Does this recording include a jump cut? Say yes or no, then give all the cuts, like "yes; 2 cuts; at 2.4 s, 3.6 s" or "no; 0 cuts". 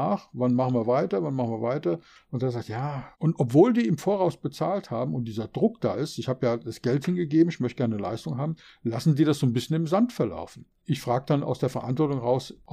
no; 0 cuts